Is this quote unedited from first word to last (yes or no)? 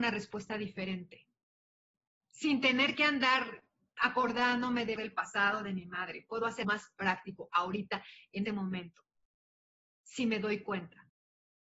no